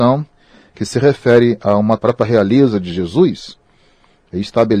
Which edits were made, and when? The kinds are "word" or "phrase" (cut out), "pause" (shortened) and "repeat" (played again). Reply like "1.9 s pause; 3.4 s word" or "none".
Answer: 2.0 s phrase